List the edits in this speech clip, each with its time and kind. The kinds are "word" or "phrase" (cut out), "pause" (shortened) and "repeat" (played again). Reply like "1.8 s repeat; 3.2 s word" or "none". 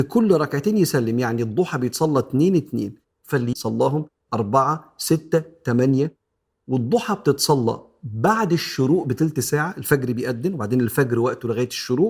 3.5 s phrase